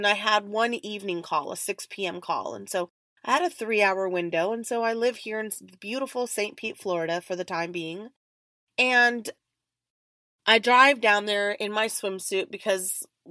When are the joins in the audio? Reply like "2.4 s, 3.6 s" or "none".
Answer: none